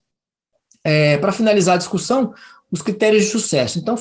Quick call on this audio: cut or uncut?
uncut